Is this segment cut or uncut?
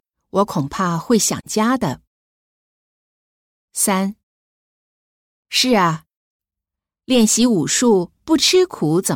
uncut